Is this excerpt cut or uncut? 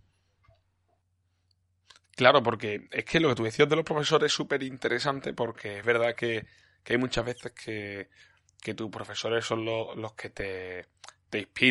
uncut